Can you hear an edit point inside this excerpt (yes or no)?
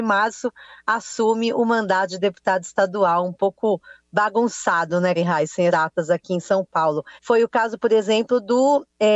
yes